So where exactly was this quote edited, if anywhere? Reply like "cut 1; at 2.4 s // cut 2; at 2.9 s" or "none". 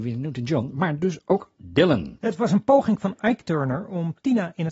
cut 1; at 1.6 s